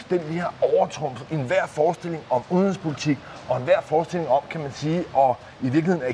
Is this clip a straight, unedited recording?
yes; 0 cuts

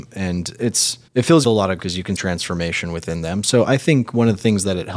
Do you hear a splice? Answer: yes; 4 cuts; at 1.1 s, 1.4 s, 1.8 s, 2.2 s

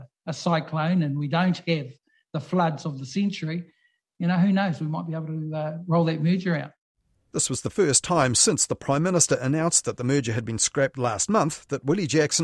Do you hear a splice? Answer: no; 0 cuts

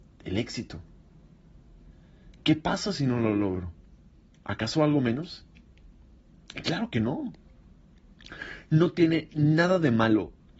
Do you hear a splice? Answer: no; 0 cuts

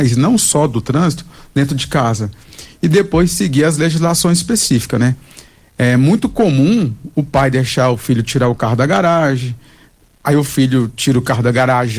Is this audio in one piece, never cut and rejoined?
yes; 0 cuts

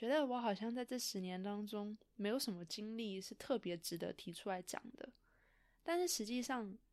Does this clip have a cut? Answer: no; 0 cuts

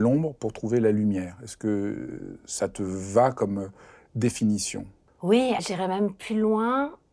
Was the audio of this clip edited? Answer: yes; 1 cut; at 5.6 s

